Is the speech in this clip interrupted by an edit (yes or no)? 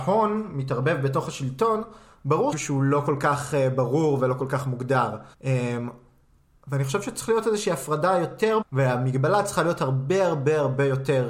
yes